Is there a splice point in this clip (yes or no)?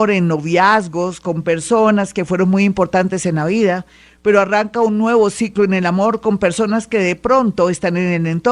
no